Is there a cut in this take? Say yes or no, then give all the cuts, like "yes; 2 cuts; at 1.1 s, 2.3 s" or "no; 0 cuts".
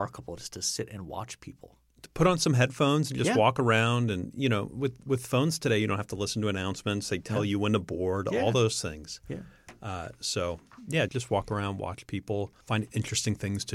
yes; 2 cuts; at 11.1 s, 12.6 s